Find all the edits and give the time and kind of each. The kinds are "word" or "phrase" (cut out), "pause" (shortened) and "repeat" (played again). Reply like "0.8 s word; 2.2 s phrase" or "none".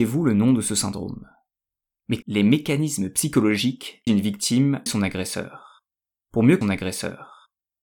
2.2 s word; 4.1 s phrase; 4.9 s phrase; 6.6 s repeat